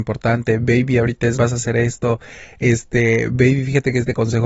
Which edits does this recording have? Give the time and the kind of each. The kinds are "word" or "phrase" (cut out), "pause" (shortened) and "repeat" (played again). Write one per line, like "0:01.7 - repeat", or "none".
0:01.3 - phrase